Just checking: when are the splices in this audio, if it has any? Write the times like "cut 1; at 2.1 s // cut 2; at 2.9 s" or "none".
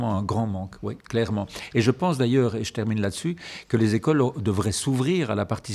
cut 1; at 1.0 s